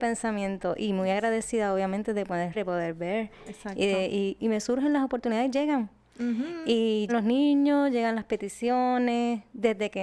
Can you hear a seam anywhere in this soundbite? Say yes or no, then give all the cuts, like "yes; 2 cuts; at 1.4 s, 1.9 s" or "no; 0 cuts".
yes; 3 cuts; at 2.5 s, 4.4 s, 7.1 s